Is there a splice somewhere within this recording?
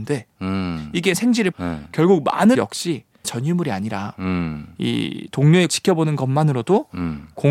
yes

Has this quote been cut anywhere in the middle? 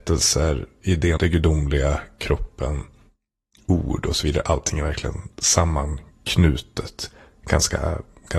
yes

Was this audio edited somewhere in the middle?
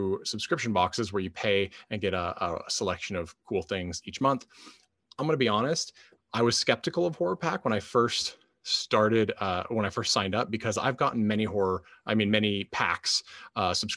no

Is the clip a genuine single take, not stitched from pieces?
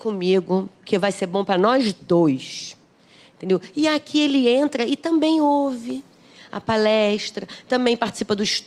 yes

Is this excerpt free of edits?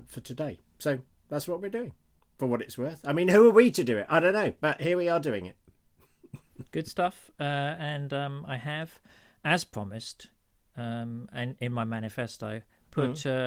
yes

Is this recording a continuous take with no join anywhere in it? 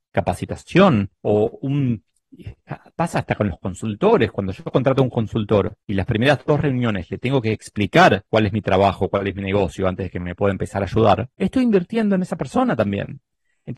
no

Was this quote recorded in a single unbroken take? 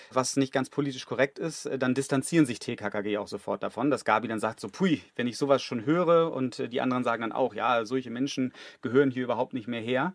yes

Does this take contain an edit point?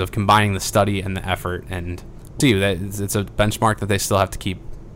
yes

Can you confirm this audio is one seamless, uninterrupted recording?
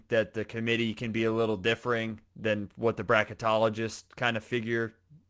yes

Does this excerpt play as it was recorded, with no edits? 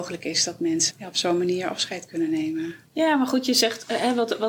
no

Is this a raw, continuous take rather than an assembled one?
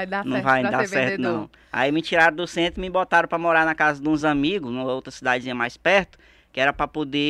yes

